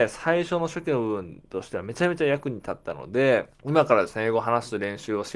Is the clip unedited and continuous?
no; 1 cut; at 3.5 s

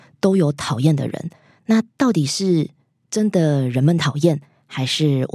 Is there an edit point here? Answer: yes; 1 cut; at 1.9 s

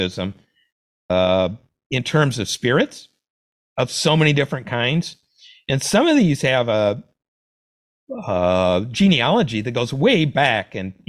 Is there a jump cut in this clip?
no; 0 cuts

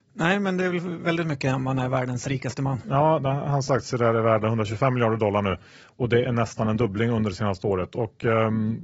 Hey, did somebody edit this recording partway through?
no; 0 cuts

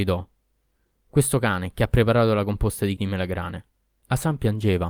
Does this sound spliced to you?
yes; 1 cut; at 3.0 s

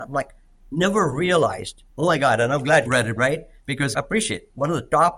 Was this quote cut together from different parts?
yes; 4 cuts; at 1.9 s, 2.9 s, 3.2 s, 3.9 s

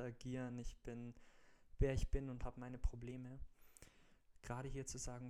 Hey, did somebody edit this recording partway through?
no; 0 cuts

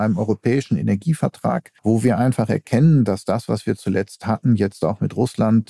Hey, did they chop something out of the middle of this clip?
yes; 1 cut; at 1.8 s

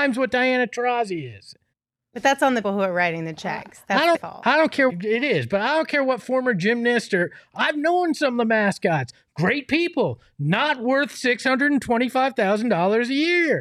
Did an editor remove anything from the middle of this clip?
yes; 4 cuts; at 1.7 s, 2.6 s, 4.1 s, 4.9 s

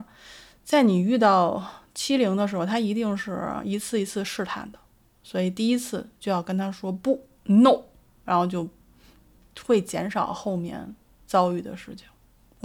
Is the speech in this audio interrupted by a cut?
no; 0 cuts

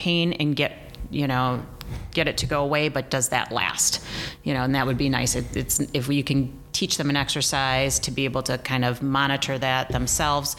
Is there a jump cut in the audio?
no; 0 cuts

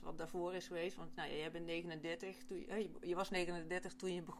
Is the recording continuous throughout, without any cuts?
yes; 0 cuts

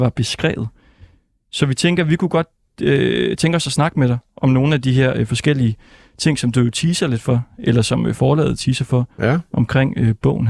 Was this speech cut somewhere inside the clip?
no; 0 cuts

